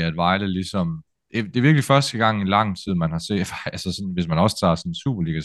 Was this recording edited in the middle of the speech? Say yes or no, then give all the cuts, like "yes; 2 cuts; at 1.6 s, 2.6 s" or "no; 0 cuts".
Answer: no; 0 cuts